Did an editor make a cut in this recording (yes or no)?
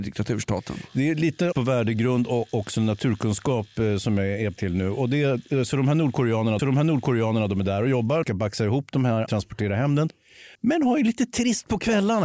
yes